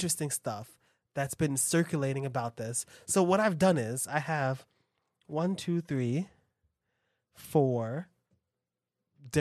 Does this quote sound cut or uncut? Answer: uncut